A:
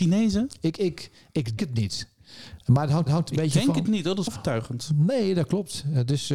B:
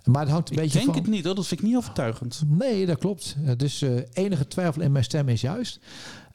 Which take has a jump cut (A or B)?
A